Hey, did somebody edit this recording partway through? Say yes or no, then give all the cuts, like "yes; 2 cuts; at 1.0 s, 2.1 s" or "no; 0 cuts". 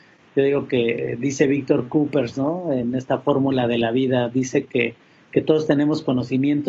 no; 0 cuts